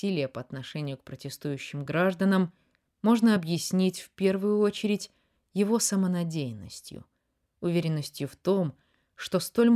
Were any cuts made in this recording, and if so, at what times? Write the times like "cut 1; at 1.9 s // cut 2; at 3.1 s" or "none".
none